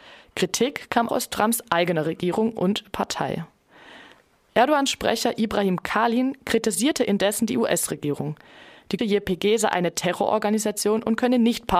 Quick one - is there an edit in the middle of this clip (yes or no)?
yes